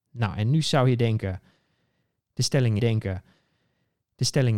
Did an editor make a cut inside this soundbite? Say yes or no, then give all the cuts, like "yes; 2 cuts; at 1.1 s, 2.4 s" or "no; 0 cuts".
yes; 1 cut; at 2.8 s